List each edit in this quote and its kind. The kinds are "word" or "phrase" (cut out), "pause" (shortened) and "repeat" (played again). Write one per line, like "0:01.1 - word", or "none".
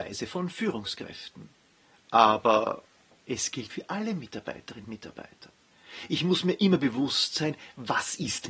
0:03.7 - word
0:04.8 - word